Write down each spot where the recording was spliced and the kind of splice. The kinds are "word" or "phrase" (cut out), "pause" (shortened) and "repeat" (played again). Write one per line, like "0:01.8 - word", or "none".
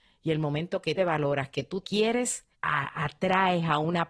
0:01.0 - phrase
0:01.8 - word
0:02.5 - pause